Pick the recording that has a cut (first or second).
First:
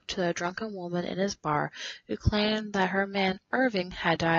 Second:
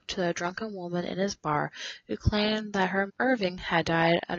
second